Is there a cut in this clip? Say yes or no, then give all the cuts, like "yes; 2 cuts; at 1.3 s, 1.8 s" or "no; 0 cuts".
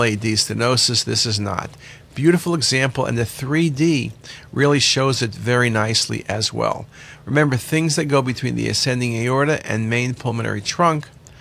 no; 0 cuts